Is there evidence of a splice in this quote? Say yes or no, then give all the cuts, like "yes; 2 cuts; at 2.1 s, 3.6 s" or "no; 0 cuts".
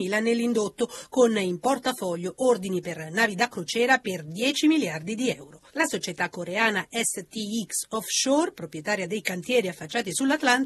no; 0 cuts